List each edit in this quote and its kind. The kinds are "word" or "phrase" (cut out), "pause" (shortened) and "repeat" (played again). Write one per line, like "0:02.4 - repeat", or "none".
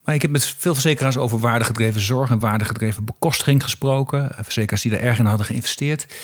none

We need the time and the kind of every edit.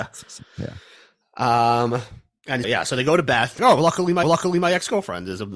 0:02.6 - word
0:03.6 - word
0:04.2 - repeat

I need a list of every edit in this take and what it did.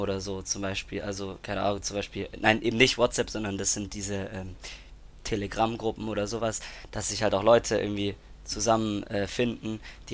none

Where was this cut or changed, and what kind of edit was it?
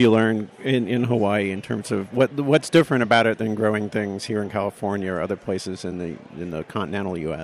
none

